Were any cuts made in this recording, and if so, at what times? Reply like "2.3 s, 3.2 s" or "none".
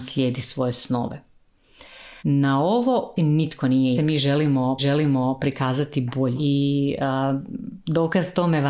2.2 s, 3.2 s, 4.0 s, 4.8 s, 6.4 s